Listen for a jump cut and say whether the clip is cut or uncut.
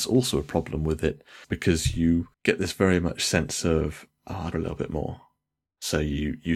cut